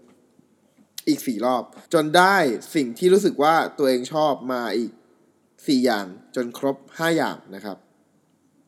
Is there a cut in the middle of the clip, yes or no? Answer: yes